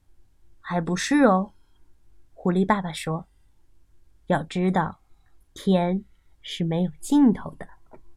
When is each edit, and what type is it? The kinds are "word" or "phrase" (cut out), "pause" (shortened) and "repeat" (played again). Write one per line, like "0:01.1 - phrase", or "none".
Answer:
none